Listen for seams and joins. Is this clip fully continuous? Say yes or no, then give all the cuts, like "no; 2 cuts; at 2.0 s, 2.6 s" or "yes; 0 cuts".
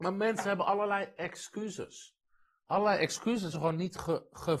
no; 1 cut; at 3.5 s